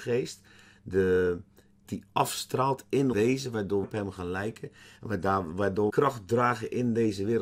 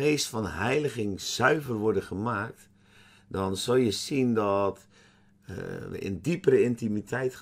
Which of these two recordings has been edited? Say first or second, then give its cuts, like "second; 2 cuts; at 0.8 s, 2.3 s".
first; 4 cuts; at 1.8 s, 3.1 s, 3.8 s, 5.9 s